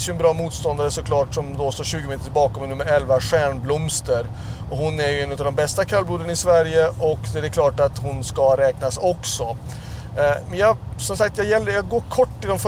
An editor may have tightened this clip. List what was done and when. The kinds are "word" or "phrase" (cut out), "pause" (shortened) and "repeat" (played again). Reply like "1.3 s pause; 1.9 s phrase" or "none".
none